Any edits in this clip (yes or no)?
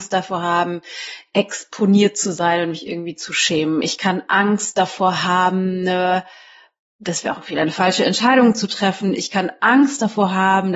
no